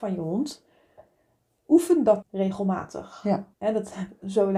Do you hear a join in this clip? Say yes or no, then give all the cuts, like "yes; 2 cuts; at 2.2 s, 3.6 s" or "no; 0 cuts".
yes; 2 cuts; at 2.2 s, 3.5 s